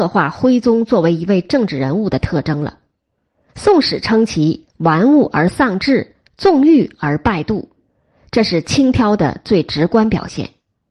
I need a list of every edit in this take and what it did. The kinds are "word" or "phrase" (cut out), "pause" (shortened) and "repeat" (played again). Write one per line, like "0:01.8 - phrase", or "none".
0:03.5 - pause

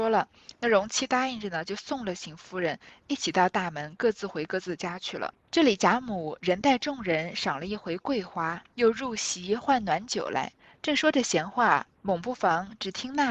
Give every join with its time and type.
0:05.4 - pause
0:08.7 - pause
0:10.6 - pause
0:12.0 - pause

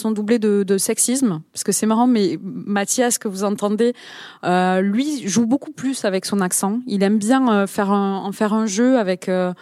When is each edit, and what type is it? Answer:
none

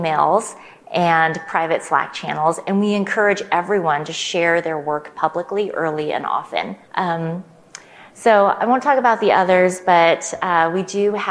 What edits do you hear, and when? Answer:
0:06.8 - pause

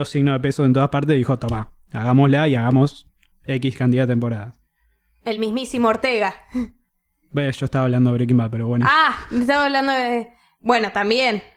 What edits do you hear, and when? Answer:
none

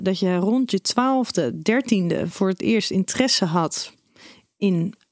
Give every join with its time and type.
none

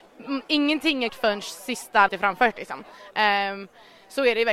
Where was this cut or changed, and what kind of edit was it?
0:01.1 - word
0:02.1 - word

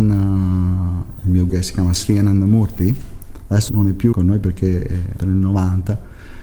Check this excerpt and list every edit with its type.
0:01.5 - word
0:02.0 - word
0:03.7 - word
0:04.1 - word
0:05.2 - word

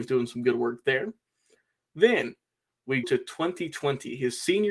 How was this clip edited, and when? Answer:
0:03.0 - word

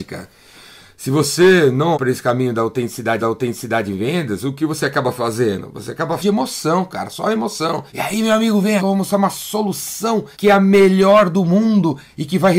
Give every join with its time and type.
0:01.9 - word
0:03.2 - repeat
0:06.2 - phrase
0:07.9 - pause
0:08.8 - word
0:10.3 - pause

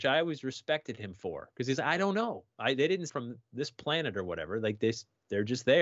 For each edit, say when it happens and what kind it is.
0:03.1 - phrase

